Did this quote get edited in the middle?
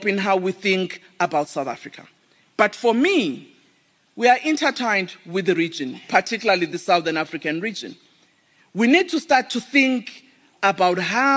no; 0 cuts

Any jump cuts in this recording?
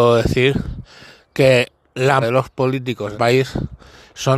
yes; 2 cuts; at 2.2 s, 3.1 s

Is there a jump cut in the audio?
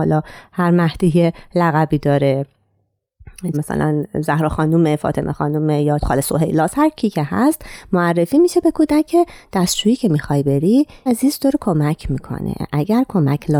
yes; 3 cuts; at 3.5 s, 6.0 s, 11.1 s

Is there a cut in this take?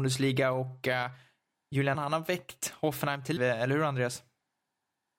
yes; 2 cuts; at 1.9 s, 3.4 s

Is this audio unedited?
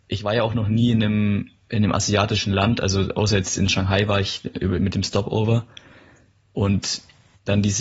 yes; 0 cuts

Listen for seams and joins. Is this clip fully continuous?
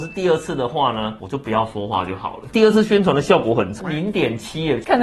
no; 1 cut; at 3.8 s

